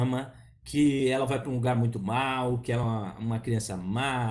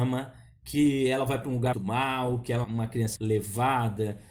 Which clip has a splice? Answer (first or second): second